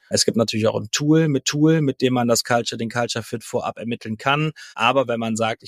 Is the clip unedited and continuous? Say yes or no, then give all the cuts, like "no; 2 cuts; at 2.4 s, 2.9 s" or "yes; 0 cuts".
no; 2 cuts; at 1.4 s, 4.7 s